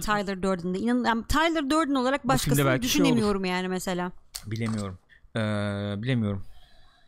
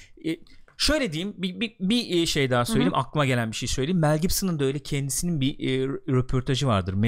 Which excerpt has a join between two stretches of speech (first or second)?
first